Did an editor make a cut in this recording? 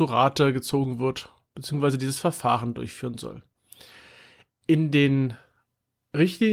no; 0 cuts

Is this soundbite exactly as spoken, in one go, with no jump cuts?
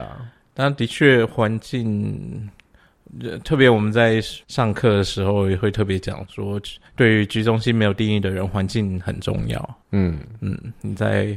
no; 3 cuts; at 4.4 s, 6.9 s, 9.8 s

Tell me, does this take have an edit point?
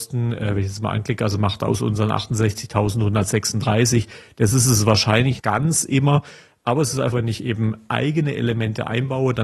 yes; 2 cuts; at 5.4 s, 7.1 s

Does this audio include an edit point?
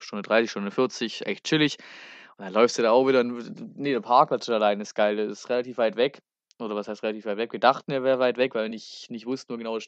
no; 0 cuts

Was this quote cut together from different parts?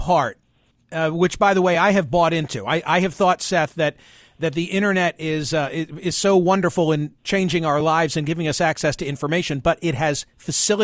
no; 0 cuts

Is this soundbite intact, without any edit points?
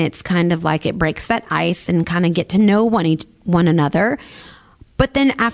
yes; 0 cuts

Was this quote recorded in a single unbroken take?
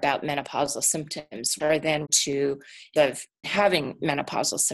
no; 4 cuts; at 1.6 s, 2.0 s, 3.0 s, 3.4 s

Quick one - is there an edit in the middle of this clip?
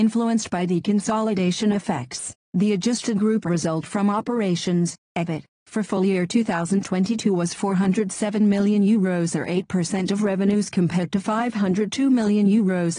no; 0 cuts

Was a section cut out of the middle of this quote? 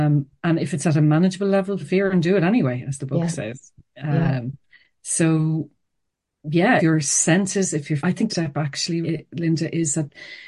yes; 5 cuts; at 1.8 s, 6.8 s, 8.0 s, 8.3 s, 9.0 s

